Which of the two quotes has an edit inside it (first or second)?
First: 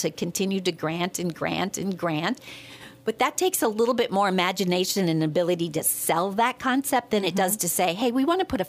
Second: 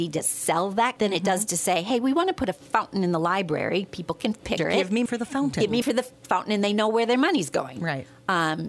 second